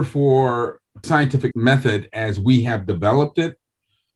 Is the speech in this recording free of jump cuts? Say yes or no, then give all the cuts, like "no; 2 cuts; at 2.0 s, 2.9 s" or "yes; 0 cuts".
no; 2 cuts; at 1.0 s, 1.5 s